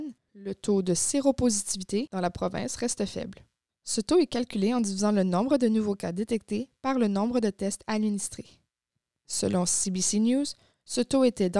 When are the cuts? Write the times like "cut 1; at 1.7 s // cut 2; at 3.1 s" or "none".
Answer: none